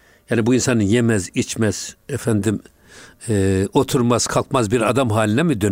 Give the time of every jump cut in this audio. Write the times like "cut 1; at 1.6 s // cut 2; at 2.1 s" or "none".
none